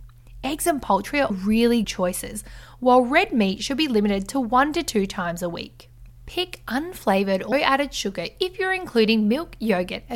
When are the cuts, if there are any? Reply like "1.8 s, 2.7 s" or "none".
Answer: 1.3 s, 1.8 s, 7.5 s